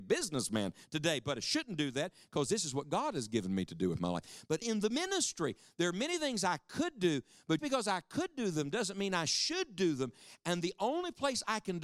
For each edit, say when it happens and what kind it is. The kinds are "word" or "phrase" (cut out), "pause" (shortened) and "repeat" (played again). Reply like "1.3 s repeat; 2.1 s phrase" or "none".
4.6 s word; 7.6 s word